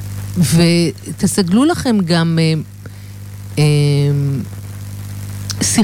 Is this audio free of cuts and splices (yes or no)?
yes